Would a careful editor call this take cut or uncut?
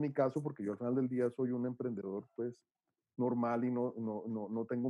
uncut